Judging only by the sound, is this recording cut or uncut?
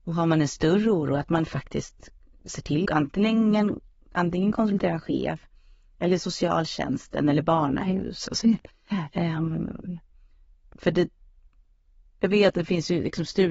cut